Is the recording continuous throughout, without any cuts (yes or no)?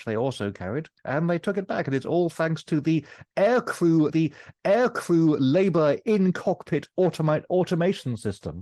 no